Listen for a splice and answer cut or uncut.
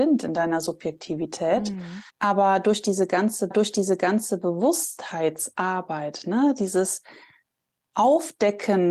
cut